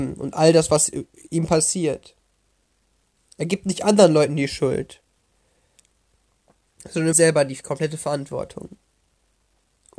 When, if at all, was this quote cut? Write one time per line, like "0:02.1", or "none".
0:07.1